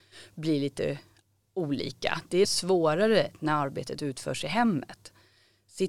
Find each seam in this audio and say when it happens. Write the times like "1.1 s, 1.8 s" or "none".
2.4 s